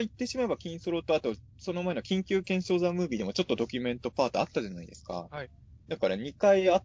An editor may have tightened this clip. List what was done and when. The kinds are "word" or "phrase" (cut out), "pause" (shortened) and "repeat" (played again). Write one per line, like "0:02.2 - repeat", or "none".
0:05.8 - pause